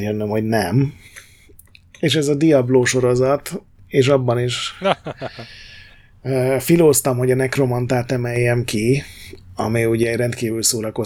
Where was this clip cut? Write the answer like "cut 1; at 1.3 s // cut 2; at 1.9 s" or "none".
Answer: none